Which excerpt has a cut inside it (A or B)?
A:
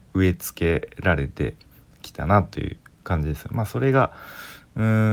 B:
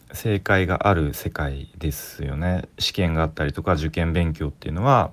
B